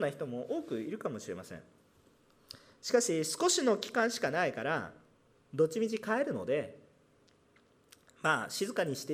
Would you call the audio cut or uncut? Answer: uncut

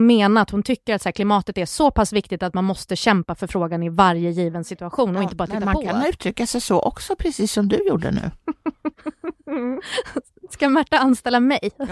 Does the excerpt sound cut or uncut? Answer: uncut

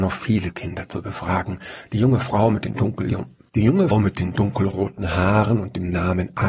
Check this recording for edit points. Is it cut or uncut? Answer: cut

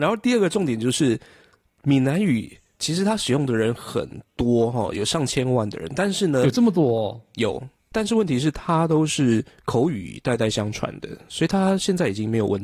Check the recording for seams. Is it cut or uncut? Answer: cut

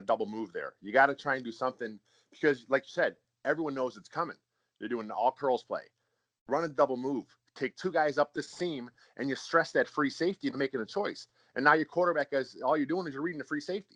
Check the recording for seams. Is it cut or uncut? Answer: uncut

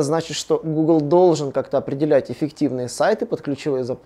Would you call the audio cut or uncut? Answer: uncut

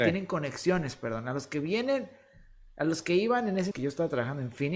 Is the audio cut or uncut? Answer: cut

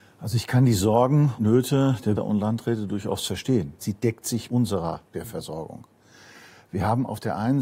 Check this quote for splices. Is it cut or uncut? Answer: cut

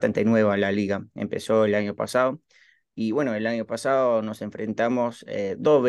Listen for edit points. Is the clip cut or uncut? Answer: uncut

